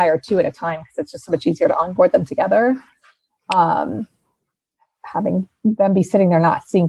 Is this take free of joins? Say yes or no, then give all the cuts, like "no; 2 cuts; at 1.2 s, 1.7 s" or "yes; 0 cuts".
yes; 0 cuts